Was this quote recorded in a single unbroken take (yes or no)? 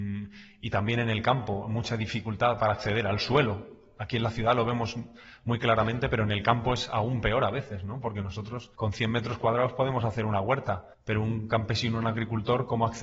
no